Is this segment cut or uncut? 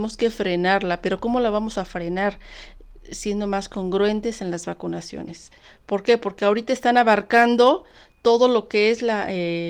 uncut